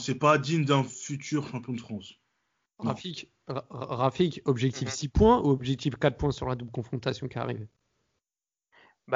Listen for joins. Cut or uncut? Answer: uncut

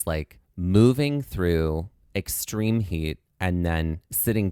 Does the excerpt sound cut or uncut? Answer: uncut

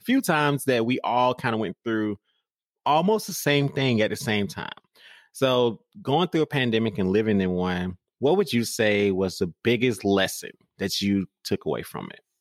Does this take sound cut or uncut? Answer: uncut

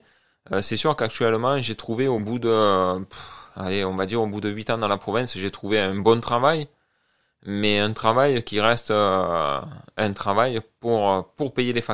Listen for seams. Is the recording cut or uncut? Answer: uncut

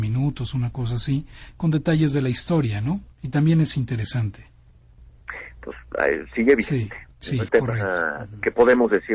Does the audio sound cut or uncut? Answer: cut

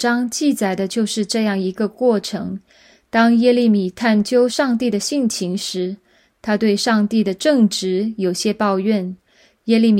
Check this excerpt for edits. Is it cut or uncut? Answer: uncut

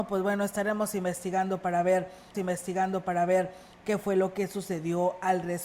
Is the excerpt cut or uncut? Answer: cut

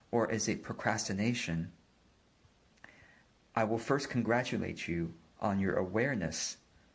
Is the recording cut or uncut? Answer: uncut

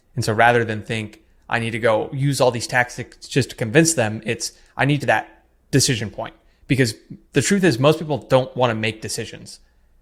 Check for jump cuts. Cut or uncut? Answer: cut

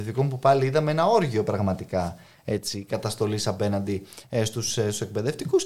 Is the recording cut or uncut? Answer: uncut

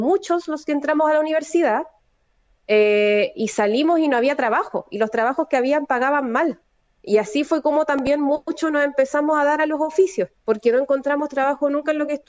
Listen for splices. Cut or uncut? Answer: uncut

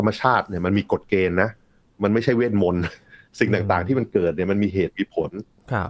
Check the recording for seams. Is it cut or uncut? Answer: uncut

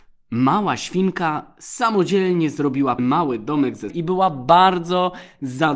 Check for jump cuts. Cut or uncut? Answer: cut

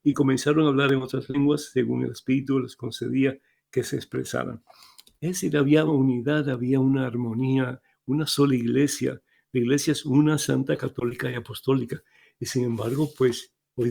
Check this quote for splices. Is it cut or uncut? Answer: cut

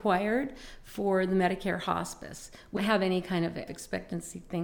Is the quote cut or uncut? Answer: cut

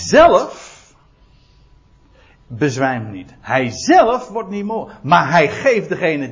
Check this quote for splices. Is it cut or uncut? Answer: uncut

